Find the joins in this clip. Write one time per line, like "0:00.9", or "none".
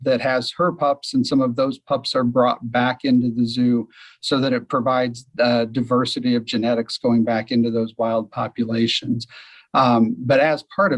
none